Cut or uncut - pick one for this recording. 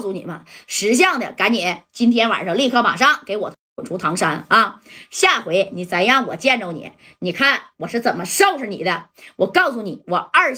uncut